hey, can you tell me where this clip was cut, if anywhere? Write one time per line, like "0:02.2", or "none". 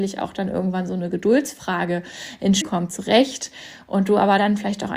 0:02.6